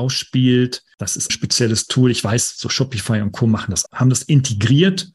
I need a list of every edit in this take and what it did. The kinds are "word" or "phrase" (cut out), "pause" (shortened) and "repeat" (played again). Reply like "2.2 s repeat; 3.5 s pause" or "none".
1.3 s phrase; 3.9 s word